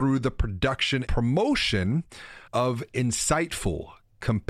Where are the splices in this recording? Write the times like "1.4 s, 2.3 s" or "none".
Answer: 1.1 s, 2.5 s